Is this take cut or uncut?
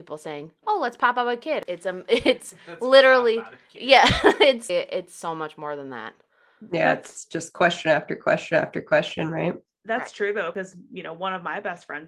cut